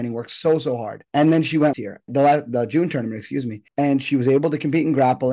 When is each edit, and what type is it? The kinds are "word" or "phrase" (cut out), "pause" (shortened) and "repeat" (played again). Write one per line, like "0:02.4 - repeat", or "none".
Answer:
0:01.1 - pause
0:01.7 - word
0:02.1 - word
0:03.7 - pause

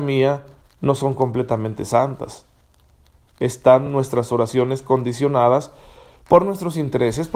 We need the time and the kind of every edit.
none

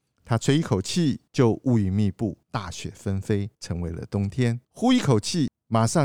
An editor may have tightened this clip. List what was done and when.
0:01.3 - pause
0:02.4 - pause
0:03.5 - pause
0:04.6 - pause

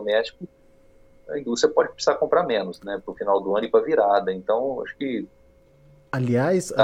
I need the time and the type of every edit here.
none

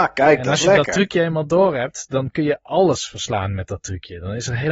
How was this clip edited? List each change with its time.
none

